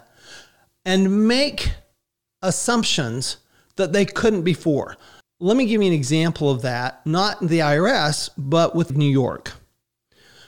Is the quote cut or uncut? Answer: cut